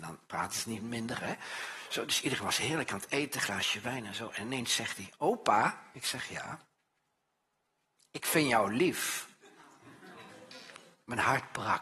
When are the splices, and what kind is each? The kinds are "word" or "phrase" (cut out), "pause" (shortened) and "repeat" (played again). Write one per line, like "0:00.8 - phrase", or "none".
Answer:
none